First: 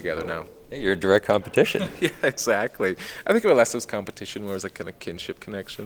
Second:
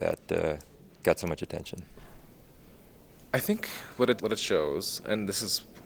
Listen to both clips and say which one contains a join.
second; 1 cut; at 4.2 s

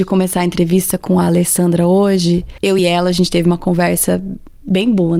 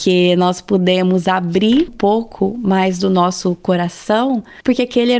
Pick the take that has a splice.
second; 1 cut; at 1.9 s

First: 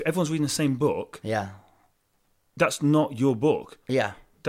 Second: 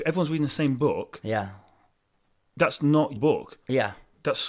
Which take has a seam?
second; 1 cut; at 3.2 s

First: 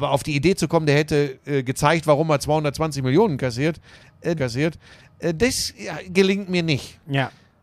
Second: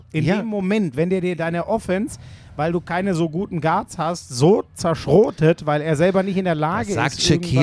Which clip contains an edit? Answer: first; 1 cut; at 4.4 s

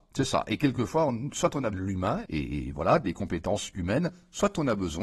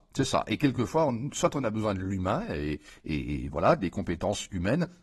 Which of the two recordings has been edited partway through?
first; 2 cuts; at 1.7 s, 2.2 s

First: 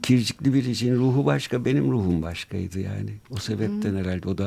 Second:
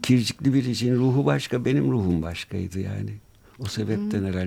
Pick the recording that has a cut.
first; 1 cut; at 3.2 s

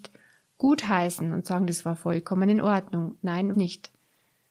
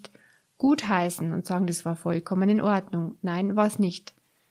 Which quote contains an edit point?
first; 1 cut; at 3.5 s

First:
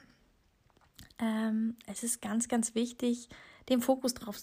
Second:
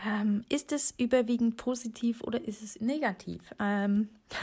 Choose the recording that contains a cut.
second; 1 cut; at 2.8 s

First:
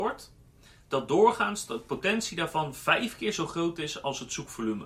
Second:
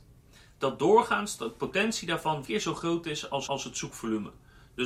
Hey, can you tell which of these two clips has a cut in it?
second; 2 cuts; at 2.4 s, 3.5 s

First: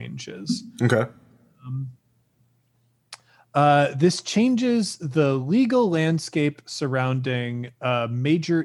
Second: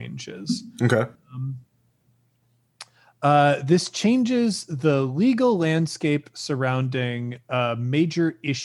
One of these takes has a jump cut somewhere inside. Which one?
second; 1 cut; at 1.1 s

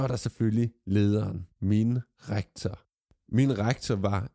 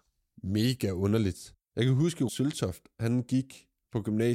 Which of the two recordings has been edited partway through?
second; 2 cuts; at 1.6 s, 2.3 s

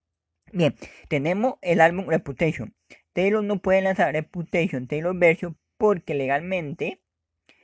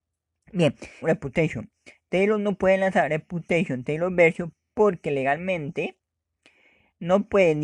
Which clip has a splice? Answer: second; 1 cut; at 1.0 s

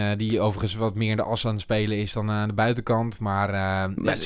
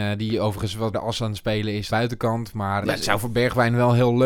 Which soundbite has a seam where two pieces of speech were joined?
second; 3 cuts; at 0.9 s, 1.9 s, 2.8 s

